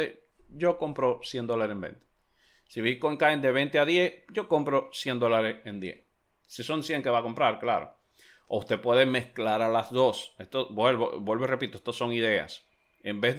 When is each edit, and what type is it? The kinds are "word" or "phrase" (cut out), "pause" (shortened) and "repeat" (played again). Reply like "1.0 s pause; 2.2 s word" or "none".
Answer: none